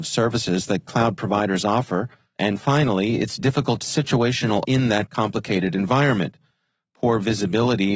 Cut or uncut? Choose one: cut